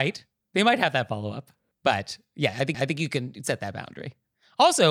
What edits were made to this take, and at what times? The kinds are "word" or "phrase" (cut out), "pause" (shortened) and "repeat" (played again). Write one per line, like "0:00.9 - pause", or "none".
0:02.7 - repeat